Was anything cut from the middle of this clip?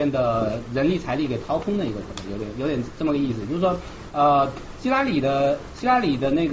no; 0 cuts

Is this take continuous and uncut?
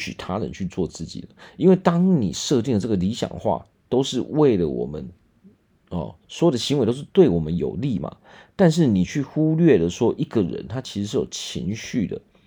yes; 0 cuts

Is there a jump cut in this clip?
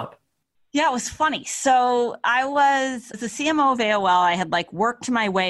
yes; 1 cut; at 3.1 s

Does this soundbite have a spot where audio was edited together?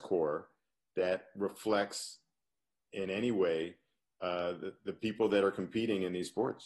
no; 0 cuts

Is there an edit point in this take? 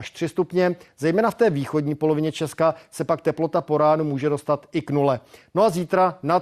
no; 0 cuts

